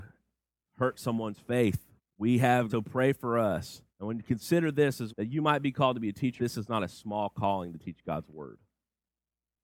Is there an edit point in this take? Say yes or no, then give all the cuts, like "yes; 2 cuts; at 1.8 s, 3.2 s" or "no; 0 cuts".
yes; 5 cuts; at 2.0 s, 2.7 s, 3.9 s, 5.1 s, 6.4 s